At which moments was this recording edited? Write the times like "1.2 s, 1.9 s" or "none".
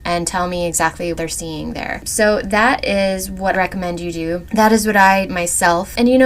1.1 s, 3.5 s, 5.3 s